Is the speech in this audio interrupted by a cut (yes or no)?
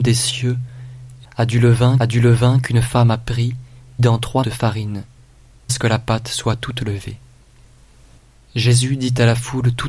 yes